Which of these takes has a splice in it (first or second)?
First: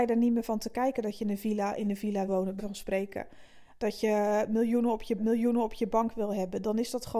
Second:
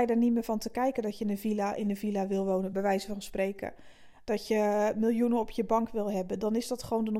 first